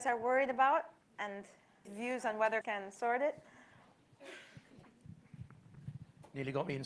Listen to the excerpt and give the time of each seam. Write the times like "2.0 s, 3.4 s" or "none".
1.8 s, 2.6 s